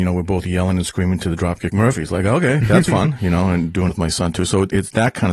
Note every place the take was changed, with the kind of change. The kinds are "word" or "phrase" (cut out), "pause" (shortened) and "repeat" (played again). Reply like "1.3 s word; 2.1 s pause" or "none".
3.9 s word